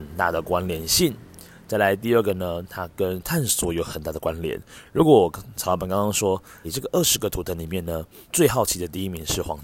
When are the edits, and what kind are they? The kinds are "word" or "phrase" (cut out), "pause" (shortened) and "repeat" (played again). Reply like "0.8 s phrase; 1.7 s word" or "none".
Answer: 6.6 s word; 8.2 s pause